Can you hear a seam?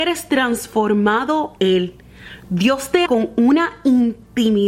yes; 2 cuts; at 1.6 s, 3.1 s

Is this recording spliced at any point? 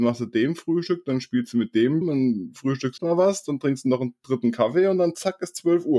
yes; 2 cuts; at 2.0 s, 3.0 s

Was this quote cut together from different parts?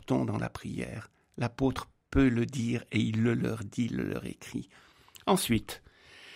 no; 0 cuts

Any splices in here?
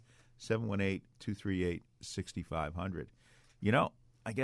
yes; 1 cut; at 1.1 s

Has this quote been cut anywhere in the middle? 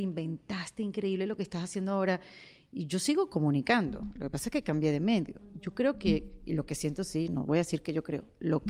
no; 0 cuts

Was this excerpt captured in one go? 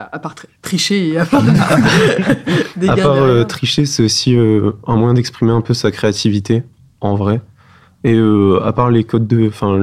yes; 0 cuts

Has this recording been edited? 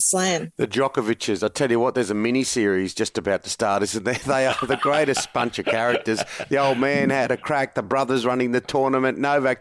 no; 0 cuts

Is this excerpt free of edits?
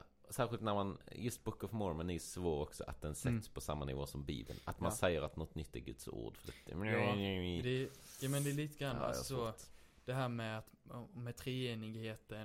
yes; 0 cuts

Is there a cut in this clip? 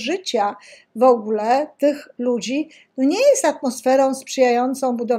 no; 0 cuts

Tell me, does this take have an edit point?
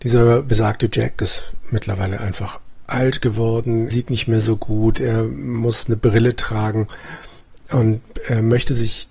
yes; 1 cut; at 3.9 s

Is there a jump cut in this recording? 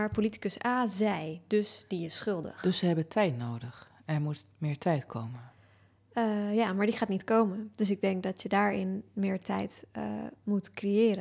no; 0 cuts

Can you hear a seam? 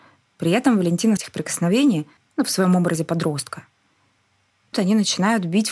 yes; 3 cuts; at 1.2 s, 2.2 s, 4.7 s

